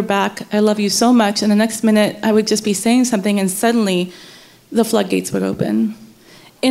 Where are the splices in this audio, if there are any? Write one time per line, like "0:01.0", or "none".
none